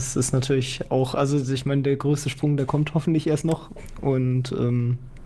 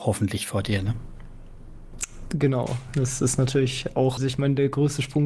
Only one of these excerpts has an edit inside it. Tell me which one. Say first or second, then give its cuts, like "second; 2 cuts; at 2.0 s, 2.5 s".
second; 1 cut; at 4.2 s